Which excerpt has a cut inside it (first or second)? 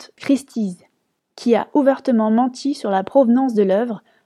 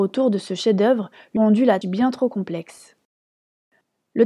second